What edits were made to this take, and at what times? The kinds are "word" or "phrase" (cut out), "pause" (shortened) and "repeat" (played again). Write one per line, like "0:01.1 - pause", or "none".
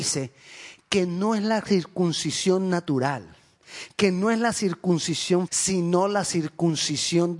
0:05.5 - word